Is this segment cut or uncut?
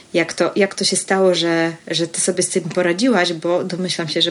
uncut